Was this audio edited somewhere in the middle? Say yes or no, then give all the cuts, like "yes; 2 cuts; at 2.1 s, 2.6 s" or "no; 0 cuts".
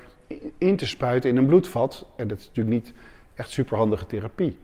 no; 0 cuts